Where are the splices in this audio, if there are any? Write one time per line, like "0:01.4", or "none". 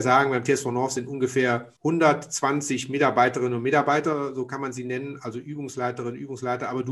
0:01.8